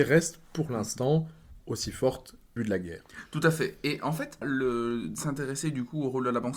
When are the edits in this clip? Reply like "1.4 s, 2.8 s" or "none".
1.6 s, 2.6 s, 4.4 s